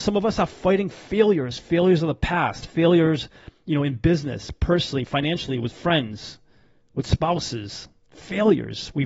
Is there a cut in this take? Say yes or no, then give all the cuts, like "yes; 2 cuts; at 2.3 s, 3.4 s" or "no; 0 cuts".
no; 0 cuts